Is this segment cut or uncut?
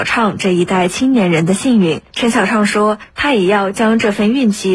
cut